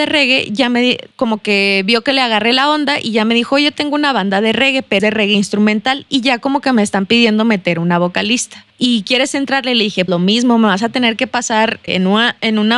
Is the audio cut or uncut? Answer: cut